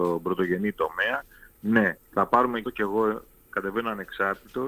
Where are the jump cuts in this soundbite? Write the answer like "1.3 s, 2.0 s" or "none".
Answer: 2.0 s, 2.6 s